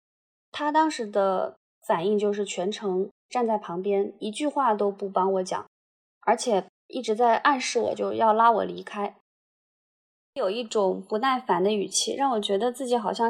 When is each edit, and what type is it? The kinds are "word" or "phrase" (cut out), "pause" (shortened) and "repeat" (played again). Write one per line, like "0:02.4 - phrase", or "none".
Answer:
none